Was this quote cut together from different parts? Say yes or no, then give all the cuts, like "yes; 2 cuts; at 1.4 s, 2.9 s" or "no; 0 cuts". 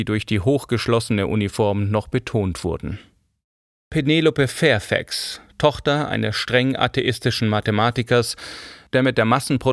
no; 0 cuts